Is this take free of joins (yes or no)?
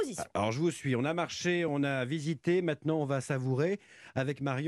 yes